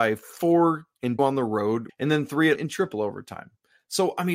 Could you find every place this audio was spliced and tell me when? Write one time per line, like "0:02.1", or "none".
0:01.2
0:01.9
0:02.6